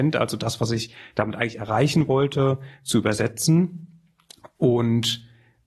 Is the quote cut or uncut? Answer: uncut